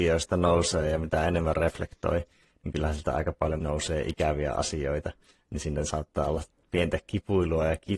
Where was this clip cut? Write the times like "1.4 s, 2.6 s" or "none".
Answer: 3.6 s